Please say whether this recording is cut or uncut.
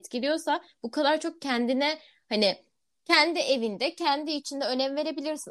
uncut